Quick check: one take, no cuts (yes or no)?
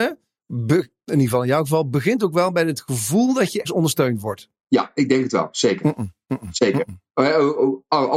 no